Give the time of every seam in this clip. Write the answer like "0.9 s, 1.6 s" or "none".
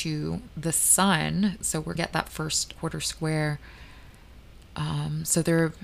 2.0 s, 2.8 s